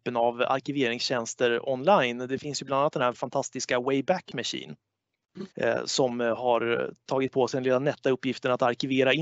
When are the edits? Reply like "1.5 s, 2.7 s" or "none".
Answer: 5.5 s